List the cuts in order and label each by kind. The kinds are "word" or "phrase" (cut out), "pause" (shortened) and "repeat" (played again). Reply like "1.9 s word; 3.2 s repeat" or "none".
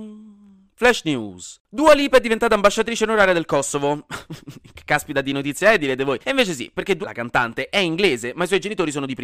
6.2 s pause; 7.0 s word